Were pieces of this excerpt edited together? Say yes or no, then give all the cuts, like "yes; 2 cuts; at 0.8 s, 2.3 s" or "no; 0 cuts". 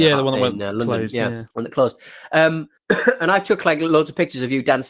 yes; 2 cuts; at 1.5 s, 2.8 s